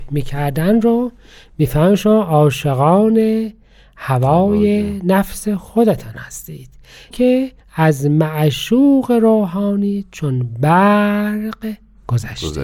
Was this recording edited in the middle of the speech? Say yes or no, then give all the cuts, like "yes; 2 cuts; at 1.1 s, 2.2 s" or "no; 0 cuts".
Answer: yes; 1 cut; at 7.1 s